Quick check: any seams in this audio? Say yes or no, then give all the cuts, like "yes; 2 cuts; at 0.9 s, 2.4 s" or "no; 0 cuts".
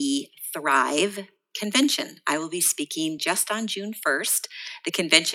no; 0 cuts